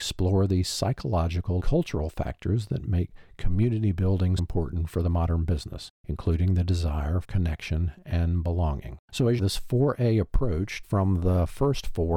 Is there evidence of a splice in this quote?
yes; 7 cuts; at 1.6 s, 4.4 s, 5.9 s, 7.2 s, 9.0 s, 9.4 s, 10.8 s

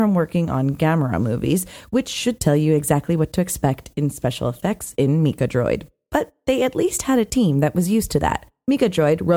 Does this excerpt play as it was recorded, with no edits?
yes; 0 cuts

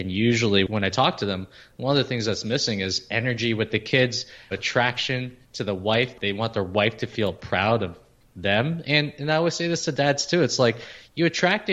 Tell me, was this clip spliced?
yes; 1 cut; at 4.5 s

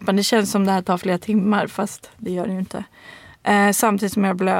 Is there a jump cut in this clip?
no; 0 cuts

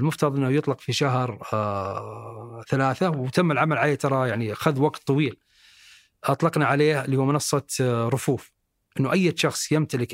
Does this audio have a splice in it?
no; 0 cuts

